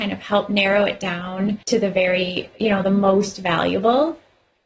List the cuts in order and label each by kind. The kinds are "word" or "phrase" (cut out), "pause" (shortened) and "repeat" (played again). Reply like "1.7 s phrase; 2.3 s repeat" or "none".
1.6 s pause; 2.5 s pause

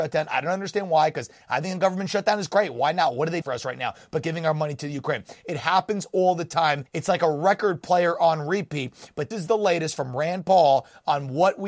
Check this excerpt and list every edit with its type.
3.4 s word; 6.9 s pause; 9.3 s word

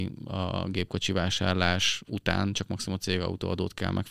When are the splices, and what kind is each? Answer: none

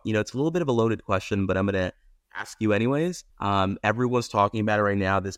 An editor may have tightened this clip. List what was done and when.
3.3 s pause

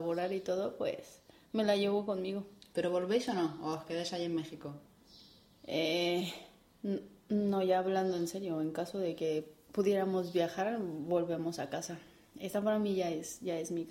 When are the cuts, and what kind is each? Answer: none

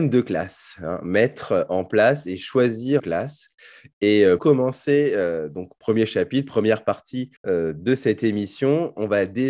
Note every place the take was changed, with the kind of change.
3.0 s phrase; 4.4 s word; 7.4 s pause

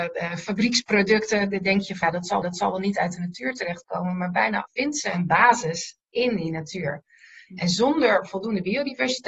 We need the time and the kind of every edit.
2.0 s word; 2.4 s repeat; 4.7 s word

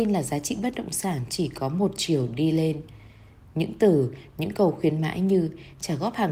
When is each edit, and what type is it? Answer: none

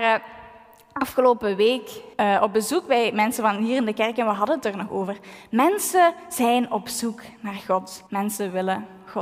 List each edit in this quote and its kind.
2.1 s pause; 8.1 s pause

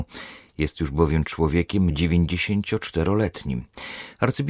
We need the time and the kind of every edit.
1.9 s word

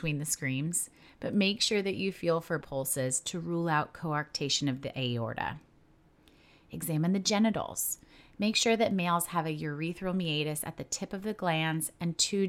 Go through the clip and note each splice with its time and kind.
2.6 s phrase

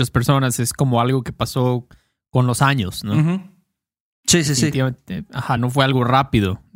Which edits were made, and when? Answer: none

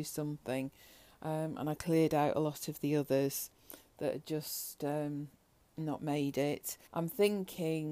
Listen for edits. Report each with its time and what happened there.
6.9 s pause

